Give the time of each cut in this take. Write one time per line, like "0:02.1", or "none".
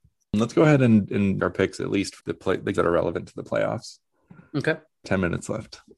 0:01.4
0:02.2
0:02.7
0:05.0